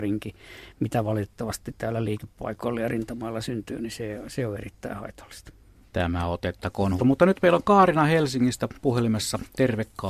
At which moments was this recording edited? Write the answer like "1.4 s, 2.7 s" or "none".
5.8 s, 7.0 s